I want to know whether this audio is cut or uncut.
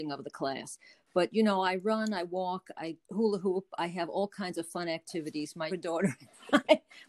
cut